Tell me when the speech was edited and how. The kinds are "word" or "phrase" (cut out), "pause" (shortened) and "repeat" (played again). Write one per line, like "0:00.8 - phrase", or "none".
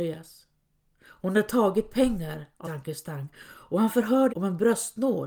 0:02.6 - word
0:04.3 - word